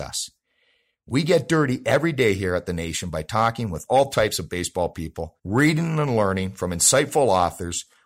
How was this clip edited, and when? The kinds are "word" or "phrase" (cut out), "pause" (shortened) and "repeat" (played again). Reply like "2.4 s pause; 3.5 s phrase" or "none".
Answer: 5.4 s pause